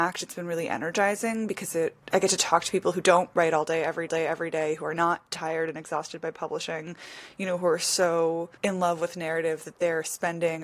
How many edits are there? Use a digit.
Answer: 3